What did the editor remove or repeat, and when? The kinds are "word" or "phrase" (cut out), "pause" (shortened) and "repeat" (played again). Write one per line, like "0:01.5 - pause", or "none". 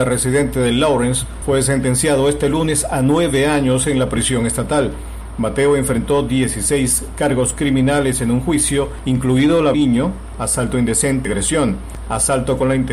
0:09.7 - phrase
0:11.2 - word